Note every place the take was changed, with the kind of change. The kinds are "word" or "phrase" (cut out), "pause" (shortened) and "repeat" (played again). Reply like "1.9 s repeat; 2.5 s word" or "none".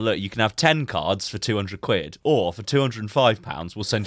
none